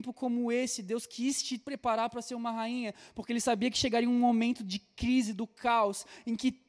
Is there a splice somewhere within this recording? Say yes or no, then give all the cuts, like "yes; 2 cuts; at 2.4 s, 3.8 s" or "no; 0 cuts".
no; 0 cuts